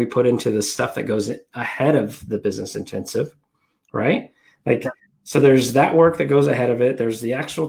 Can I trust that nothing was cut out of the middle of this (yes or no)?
yes